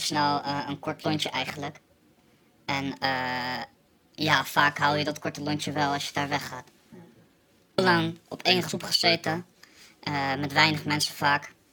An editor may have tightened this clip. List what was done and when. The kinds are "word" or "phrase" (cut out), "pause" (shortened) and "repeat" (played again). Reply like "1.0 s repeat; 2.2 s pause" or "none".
none